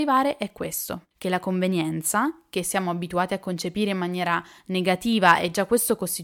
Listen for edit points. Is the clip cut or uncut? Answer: cut